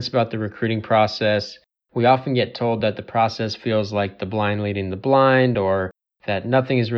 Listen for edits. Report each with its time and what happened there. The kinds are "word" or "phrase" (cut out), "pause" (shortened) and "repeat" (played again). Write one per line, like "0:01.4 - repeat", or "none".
none